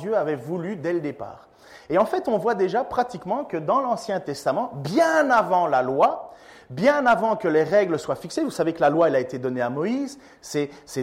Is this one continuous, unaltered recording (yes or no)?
yes